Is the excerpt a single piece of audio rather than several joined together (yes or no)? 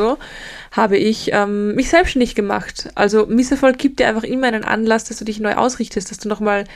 yes